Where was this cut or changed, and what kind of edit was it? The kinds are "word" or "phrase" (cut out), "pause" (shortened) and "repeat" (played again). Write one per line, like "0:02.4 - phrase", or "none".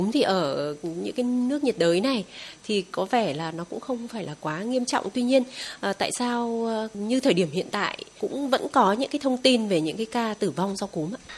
none